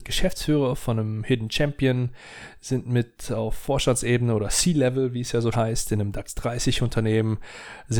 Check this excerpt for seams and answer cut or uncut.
cut